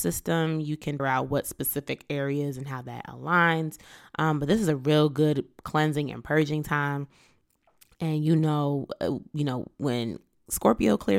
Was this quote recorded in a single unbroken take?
no; 1 cut; at 1.0 s

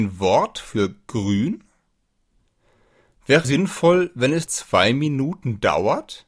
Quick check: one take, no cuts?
no; 2 cuts; at 3.4 s, 4.5 s

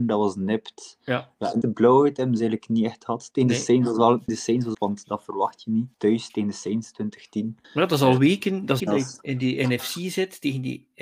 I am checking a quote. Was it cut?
yes; 6 cuts; at 1.6 s, 4.3 s, 4.7 s, 5.9 s, 7.6 s, 8.8 s

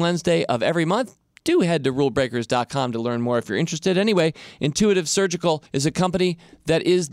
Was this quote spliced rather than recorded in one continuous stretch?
yes; 1 cut; at 5.7 s

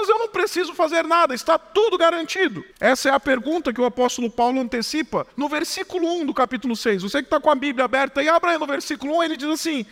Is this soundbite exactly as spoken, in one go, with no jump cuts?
no; 2 cuts; at 2.7 s, 5.3 s

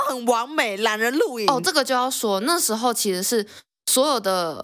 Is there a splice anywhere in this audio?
no; 0 cuts

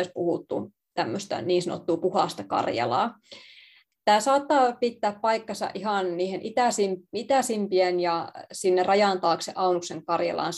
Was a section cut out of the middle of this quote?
no; 0 cuts

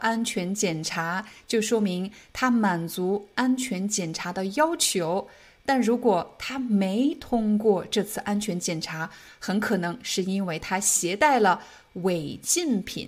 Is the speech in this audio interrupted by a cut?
no; 0 cuts

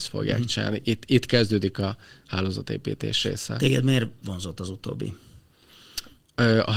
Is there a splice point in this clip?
no; 0 cuts

